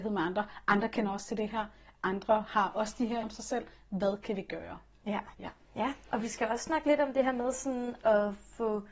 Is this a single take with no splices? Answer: no; 2 cuts; at 3.2 s, 5.3 s

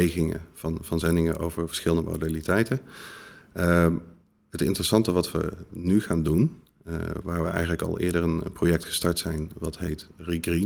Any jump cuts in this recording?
no; 0 cuts

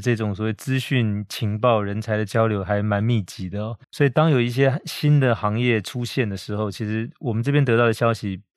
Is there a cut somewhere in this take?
yes; 1 cut; at 3.8 s

